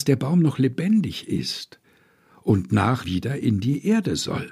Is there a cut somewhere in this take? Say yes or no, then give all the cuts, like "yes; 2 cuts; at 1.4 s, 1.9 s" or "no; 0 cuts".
yes; 1 cut; at 3.0 s